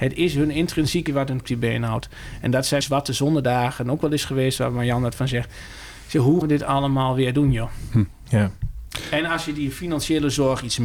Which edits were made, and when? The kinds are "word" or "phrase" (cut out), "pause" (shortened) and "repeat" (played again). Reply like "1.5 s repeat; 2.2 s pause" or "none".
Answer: 1.1 s word; 1.4 s phrase; 2.8 s word; 6.4 s word

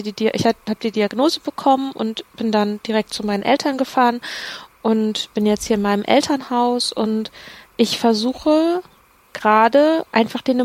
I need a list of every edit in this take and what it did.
none

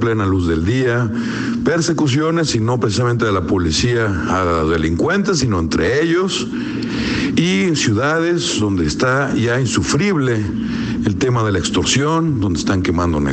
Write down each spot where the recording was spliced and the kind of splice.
none

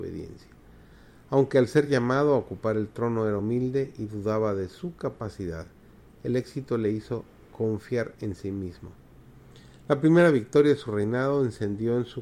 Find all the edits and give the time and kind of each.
none

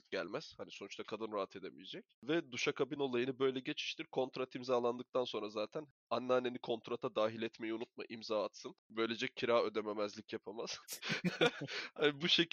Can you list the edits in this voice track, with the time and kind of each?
none

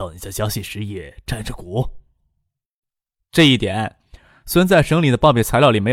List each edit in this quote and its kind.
none

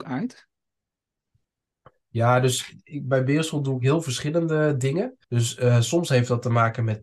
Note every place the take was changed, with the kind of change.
5.2 s pause

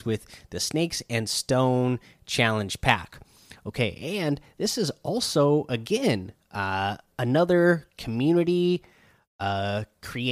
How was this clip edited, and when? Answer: none

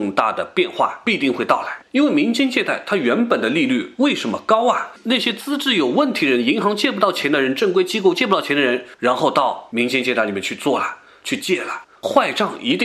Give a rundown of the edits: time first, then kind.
none

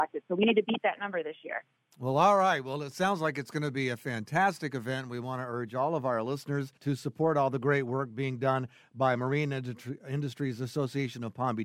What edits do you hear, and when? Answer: 1.8 s pause; 6.8 s pause

